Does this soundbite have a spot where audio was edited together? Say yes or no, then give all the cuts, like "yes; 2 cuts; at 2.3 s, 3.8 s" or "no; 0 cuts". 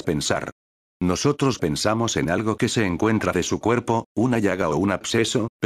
yes; 1 cut; at 3.3 s